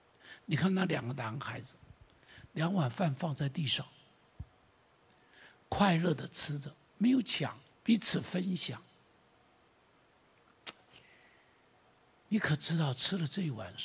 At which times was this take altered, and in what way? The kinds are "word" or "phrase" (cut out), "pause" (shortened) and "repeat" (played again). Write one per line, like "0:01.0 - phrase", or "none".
0:07.7 - pause